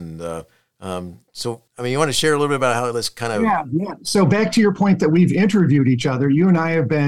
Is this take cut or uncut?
cut